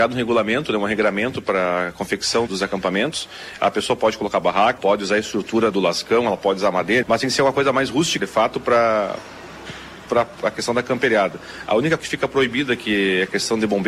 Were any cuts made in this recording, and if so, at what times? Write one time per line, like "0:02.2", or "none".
0:02.5
0:04.8
0:05.7
0:07.0
0:08.2
0:12.0